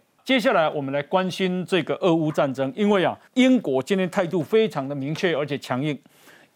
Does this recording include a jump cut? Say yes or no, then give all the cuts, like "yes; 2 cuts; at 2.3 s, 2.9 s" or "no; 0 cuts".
yes; 1 cut; at 3.3 s